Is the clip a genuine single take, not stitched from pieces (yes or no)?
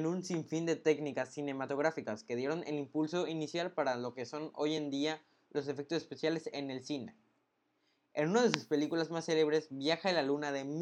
yes